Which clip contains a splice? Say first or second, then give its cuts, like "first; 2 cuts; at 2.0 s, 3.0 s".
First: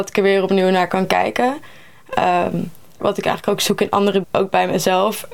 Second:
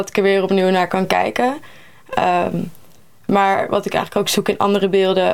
first; 2 cuts; at 3.0 s, 4.2 s